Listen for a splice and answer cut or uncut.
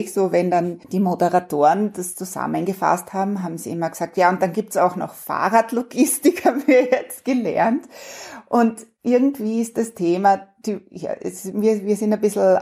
uncut